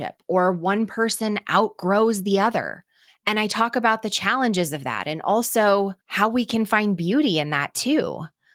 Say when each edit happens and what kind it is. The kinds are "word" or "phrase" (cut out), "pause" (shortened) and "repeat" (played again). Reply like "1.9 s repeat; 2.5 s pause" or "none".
3.1 s pause; 6.0 s pause